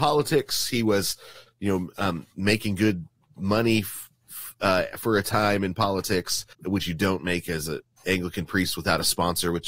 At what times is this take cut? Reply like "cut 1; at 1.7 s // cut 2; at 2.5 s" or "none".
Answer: cut 1; at 6.5 s